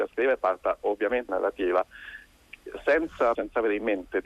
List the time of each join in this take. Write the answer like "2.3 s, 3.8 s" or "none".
1.3 s, 3.3 s